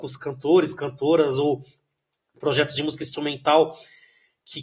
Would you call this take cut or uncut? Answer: uncut